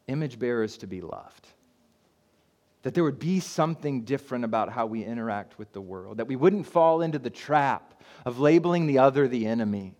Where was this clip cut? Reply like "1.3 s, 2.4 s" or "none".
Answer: none